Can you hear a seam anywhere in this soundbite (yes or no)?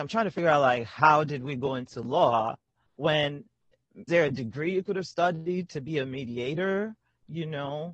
yes